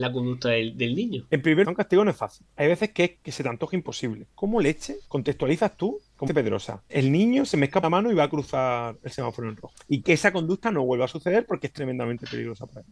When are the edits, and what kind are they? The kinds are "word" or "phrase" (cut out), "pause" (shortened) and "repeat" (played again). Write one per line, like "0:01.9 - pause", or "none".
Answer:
0:01.6 - phrase
0:03.2 - pause
0:05.1 - pause
0:06.3 - word
0:06.9 - word
0:07.8 - word
0:10.0 - word